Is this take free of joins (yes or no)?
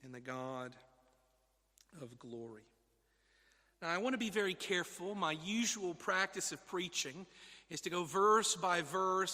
yes